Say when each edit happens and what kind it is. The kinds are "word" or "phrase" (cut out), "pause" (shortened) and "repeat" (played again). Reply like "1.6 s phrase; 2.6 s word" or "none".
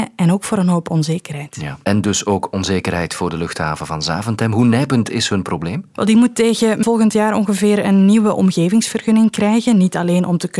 6.8 s word